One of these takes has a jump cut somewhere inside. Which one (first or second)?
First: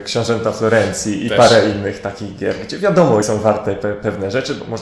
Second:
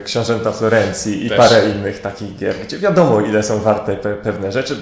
first